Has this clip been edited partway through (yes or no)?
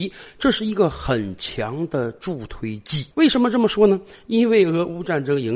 yes